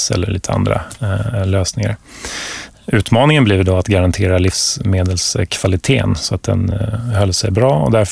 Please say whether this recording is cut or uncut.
uncut